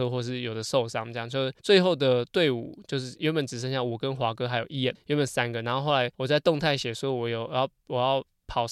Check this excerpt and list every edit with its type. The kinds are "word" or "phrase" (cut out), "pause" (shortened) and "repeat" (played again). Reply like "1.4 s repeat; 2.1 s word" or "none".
1.6 s pause; 4.9 s word; 6.1 s pause